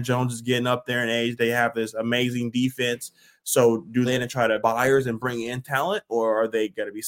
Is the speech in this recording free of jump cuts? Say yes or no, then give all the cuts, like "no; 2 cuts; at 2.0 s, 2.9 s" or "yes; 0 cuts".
no; 2 cuts; at 4.1 s, 4.6 s